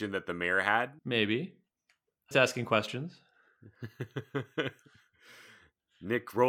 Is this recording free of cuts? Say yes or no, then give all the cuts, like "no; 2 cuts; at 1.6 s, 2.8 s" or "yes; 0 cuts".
no; 2 cuts; at 1.0 s, 2.3 s